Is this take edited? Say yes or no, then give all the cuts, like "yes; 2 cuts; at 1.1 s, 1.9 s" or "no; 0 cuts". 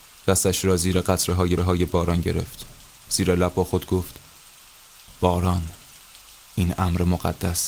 yes; 1 cut; at 1.6 s